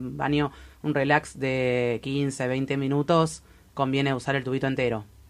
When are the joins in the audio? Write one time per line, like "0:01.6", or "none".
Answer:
none

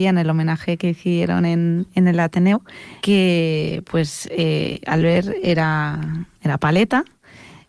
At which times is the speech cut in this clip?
0:03.0

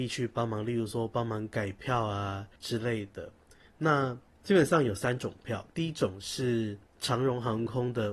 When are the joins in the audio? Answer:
0:02.6
0:04.3
0:05.7
0:06.9

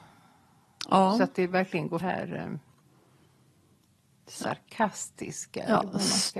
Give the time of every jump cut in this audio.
0:02.0

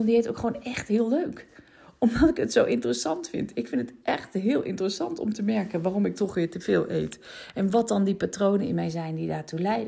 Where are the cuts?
none

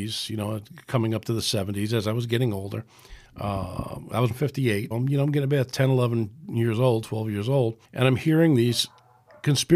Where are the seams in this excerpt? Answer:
0:03.2
0:04.3
0:04.9
0:07.8

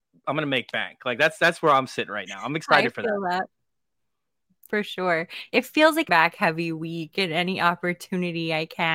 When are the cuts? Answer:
0:06.1

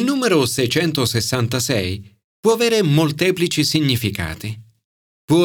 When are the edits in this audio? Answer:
none

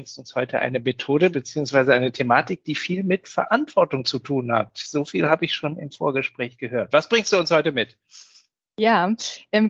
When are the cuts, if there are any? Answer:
0:01.3

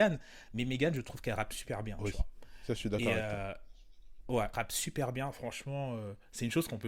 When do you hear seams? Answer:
0:04.5

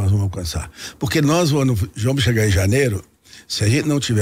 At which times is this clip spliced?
none

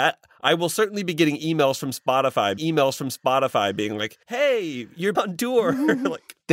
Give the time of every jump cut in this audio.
0:02.6
0:04.2
0:05.1

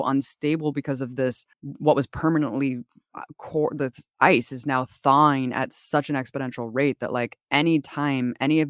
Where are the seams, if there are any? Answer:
0:01.5

